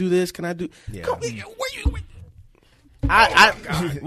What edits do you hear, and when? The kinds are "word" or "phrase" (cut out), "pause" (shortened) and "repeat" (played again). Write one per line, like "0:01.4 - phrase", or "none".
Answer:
none